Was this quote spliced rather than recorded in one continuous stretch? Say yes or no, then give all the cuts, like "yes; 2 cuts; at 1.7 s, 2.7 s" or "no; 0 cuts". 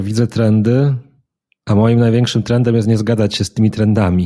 no; 0 cuts